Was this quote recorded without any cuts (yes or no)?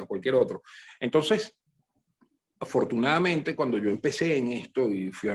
yes